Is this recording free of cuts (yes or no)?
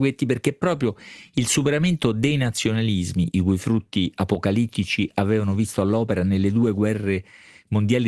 yes